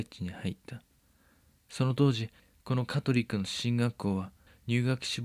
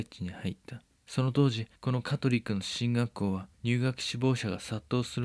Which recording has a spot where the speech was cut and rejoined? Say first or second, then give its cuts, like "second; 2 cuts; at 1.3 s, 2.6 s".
second; 3 cuts; at 0.9 s, 1.8 s, 3.5 s